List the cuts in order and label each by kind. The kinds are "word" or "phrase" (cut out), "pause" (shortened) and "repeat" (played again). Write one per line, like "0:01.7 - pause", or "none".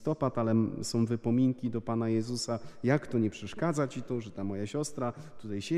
none